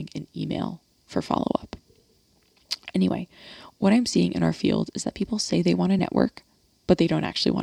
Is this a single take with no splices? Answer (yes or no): yes